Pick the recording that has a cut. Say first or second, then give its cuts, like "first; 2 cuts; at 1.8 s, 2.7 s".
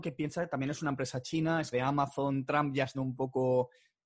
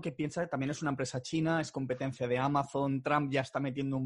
first; 2 cuts; at 1.7 s, 2.9 s